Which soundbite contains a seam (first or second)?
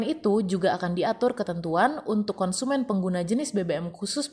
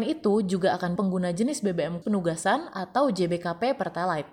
second